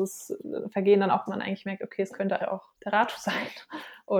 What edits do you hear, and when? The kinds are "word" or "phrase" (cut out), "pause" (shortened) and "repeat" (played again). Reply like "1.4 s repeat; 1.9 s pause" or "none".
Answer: 1.3 s phrase; 2.4 s word; 2.7 s pause